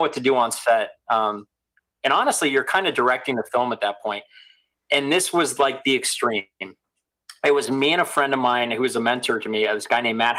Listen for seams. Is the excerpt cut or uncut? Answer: uncut